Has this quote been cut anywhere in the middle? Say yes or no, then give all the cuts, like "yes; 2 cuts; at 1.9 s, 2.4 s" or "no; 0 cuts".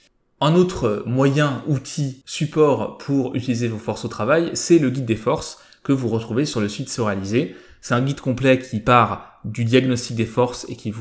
no; 0 cuts